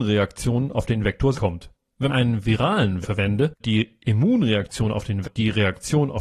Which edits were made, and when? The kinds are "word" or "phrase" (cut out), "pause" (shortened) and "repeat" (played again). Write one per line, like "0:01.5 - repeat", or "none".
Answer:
0:01.3 - word
0:02.1 - word
0:03.0 - word
0:03.6 - word
0:05.2 - word